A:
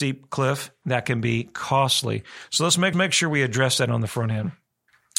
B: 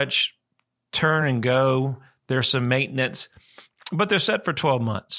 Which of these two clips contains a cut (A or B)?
A